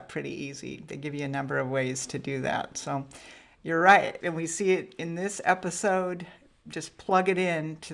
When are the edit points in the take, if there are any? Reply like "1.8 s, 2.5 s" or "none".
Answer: none